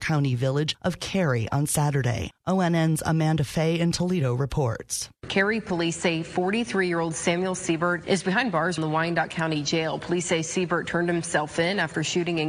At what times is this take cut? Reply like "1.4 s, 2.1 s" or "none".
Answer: none